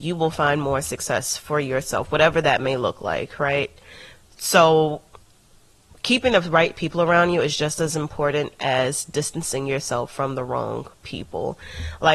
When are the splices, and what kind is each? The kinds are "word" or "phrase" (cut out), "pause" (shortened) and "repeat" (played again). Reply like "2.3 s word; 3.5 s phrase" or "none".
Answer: none